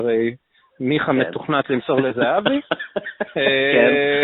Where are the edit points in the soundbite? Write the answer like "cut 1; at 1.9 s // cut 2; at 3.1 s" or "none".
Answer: none